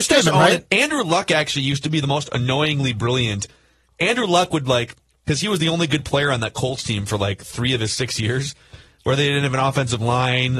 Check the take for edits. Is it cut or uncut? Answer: uncut